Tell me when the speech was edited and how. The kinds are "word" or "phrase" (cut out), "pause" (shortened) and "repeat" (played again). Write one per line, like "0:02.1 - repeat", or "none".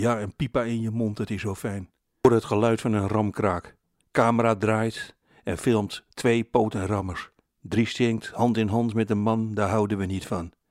0:03.8 - pause